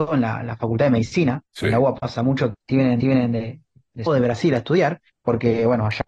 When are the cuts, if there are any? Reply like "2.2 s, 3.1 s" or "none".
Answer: 1.5 s, 2.5 s, 3.0 s, 4.1 s, 5.1 s

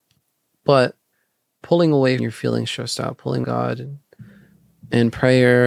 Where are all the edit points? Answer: 1.1 s, 2.2 s, 3.4 s

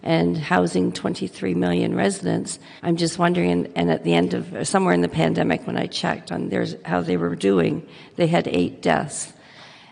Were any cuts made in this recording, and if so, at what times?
2.8 s

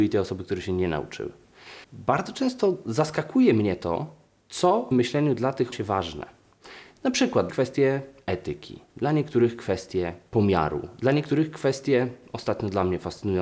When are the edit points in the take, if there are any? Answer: 1.8 s, 4.9 s, 5.7 s, 7.5 s

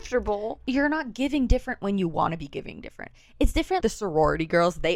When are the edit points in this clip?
3.8 s

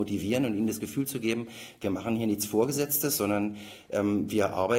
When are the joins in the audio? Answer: none

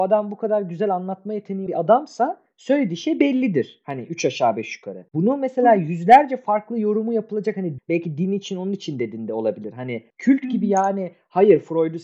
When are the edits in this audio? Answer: 1.7 s, 5.1 s, 7.8 s, 10.1 s

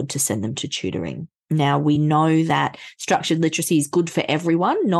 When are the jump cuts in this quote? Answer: none

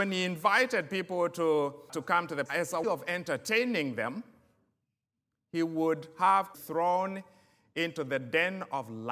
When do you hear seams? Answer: 1.9 s, 2.5 s, 2.8 s, 6.5 s

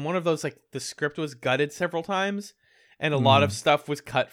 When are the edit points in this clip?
none

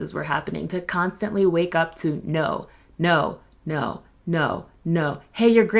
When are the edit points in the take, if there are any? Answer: none

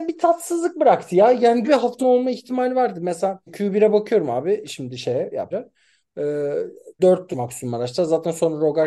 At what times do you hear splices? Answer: 1.7 s, 2.0 s, 3.5 s, 5.5 s, 7.0 s, 7.3 s

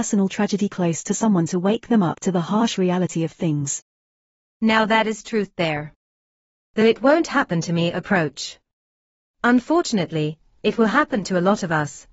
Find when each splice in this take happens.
none

